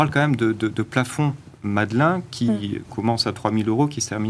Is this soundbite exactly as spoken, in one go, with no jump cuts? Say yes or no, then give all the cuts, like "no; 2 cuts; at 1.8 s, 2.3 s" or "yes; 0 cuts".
yes; 0 cuts